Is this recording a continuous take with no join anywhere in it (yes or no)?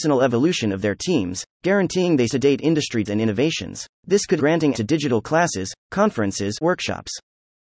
no